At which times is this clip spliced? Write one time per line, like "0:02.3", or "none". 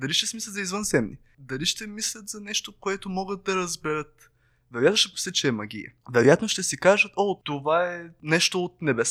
0:06.0